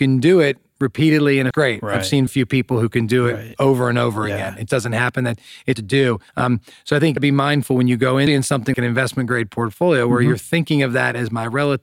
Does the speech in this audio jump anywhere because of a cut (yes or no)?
yes